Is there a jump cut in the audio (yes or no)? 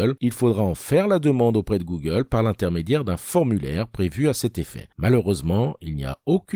no